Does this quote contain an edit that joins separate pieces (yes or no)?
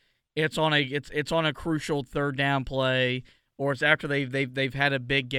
no